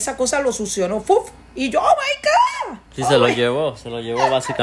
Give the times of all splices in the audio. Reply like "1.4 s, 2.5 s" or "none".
1.4 s, 2.9 s